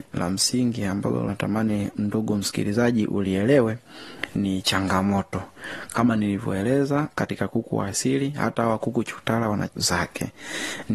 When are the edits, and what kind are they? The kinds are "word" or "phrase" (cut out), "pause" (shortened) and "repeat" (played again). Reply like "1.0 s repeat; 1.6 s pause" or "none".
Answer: 1.3 s word; 9.7 s word